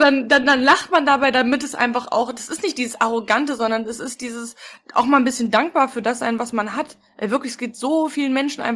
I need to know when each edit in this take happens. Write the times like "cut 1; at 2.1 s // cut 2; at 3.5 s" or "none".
none